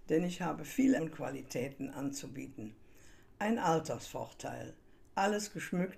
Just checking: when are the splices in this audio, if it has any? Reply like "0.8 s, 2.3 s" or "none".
1.0 s